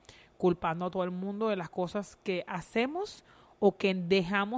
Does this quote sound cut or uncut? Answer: uncut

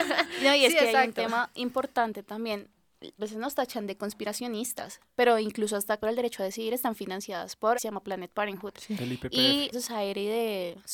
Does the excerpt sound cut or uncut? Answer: cut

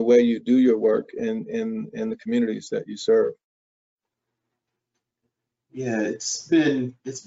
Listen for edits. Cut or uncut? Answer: uncut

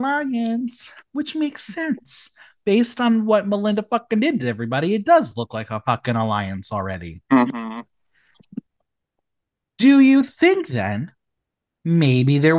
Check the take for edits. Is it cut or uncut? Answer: cut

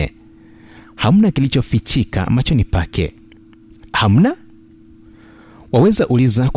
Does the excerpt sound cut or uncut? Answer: uncut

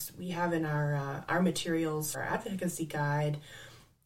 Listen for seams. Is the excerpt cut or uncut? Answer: cut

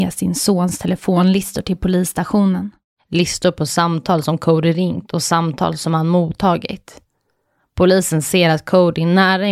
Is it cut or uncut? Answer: uncut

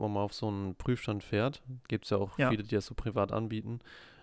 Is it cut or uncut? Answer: uncut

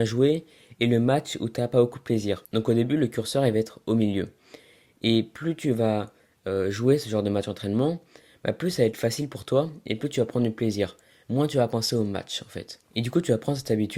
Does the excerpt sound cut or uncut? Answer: uncut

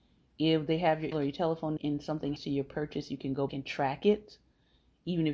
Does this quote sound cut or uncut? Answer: cut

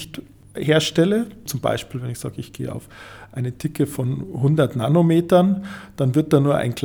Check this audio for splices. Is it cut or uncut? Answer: uncut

